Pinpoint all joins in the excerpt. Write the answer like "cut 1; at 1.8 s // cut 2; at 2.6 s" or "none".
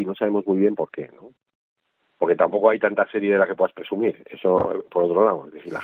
none